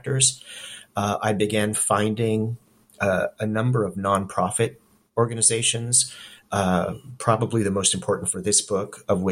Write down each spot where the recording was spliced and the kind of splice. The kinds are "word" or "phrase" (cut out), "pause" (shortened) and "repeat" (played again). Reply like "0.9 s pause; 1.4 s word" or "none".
none